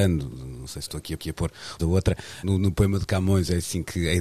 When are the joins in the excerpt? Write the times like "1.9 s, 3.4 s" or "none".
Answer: 1.2 s, 1.8 s, 2.4 s